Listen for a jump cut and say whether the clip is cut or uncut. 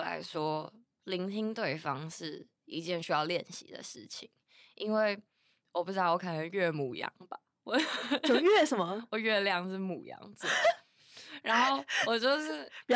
uncut